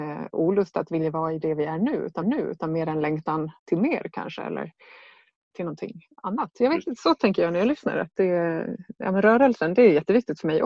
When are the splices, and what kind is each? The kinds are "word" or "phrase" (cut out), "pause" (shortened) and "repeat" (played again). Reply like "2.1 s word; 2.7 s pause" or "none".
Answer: 2.2 s repeat; 3.6 s pause; 5.5 s word; 6.1 s pause